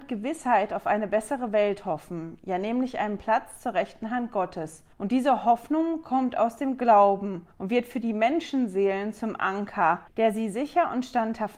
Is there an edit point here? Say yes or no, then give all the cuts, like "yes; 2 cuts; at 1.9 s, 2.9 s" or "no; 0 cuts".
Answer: yes; 3 cuts; at 4.9 s, 7.5 s, 10.1 s